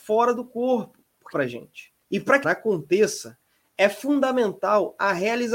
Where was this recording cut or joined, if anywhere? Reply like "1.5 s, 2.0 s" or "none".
1.3 s, 2.0 s, 2.4 s